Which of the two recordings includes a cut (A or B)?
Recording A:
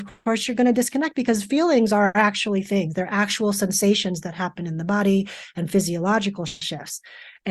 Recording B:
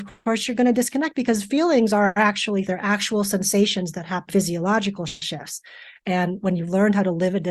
B